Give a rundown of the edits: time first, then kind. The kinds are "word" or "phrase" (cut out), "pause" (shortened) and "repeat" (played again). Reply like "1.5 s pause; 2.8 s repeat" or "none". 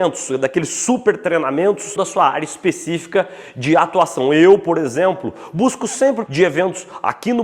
2.0 s word; 6.3 s word